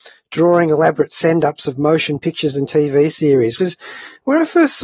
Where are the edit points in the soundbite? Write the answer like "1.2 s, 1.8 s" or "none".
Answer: 3.6 s